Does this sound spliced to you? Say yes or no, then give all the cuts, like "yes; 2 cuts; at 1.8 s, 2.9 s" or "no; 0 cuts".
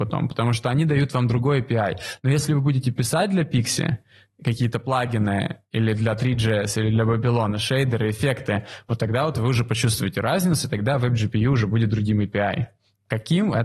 no; 0 cuts